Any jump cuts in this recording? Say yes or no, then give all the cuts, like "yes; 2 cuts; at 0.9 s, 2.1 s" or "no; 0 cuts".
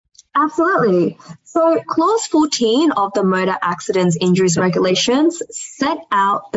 no; 0 cuts